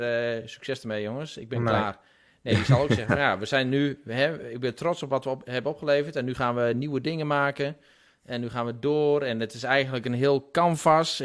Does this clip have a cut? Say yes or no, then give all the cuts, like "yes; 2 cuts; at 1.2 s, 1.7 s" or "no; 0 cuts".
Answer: no; 0 cuts